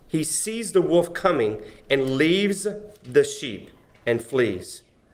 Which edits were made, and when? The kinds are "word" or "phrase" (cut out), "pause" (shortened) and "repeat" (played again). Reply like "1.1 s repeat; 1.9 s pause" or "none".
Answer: none